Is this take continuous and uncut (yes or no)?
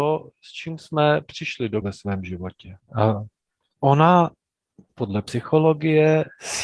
no